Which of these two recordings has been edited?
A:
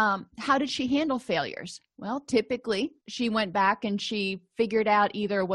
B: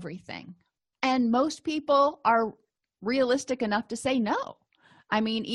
A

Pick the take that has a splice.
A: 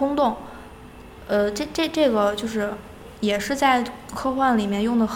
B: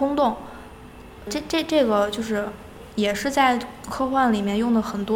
B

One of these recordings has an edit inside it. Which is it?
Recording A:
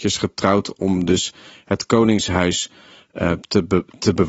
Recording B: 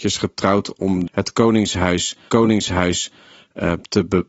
B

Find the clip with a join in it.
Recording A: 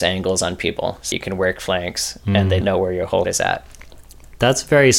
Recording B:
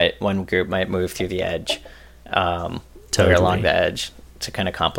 A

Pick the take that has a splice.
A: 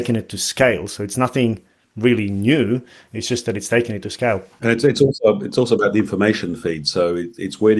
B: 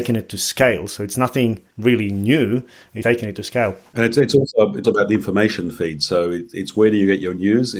B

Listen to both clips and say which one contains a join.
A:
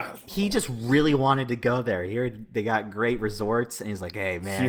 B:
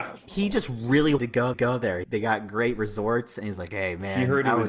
B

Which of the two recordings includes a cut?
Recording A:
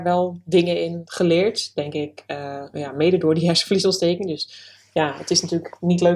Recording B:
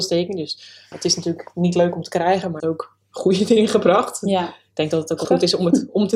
B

